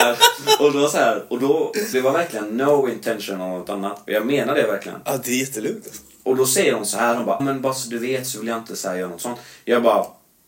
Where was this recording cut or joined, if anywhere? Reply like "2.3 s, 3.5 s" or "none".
1.9 s, 7.4 s